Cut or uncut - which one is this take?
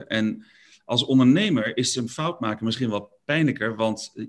uncut